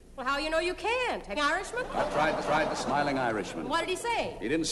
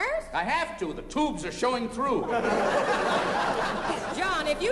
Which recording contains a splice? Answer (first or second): first